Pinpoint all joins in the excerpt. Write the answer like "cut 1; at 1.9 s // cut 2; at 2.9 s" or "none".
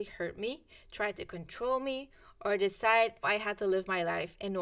cut 1; at 3.2 s